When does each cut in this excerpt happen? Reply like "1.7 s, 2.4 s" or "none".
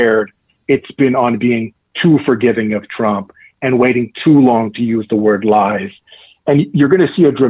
none